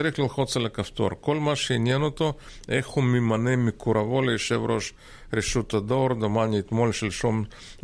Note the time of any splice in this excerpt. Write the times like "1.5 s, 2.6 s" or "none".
none